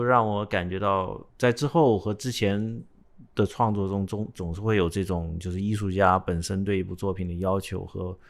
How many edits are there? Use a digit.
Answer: 1